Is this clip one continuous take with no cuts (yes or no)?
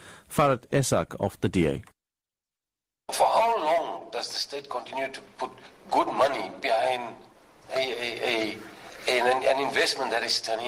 yes